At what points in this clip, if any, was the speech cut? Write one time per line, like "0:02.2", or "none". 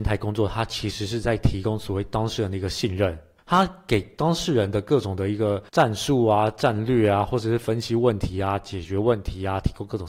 0:03.4
0:05.7